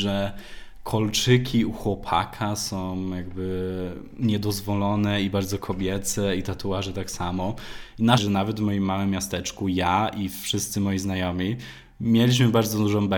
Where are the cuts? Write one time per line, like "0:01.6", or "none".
0:08.2